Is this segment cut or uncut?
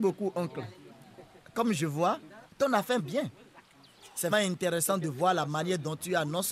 cut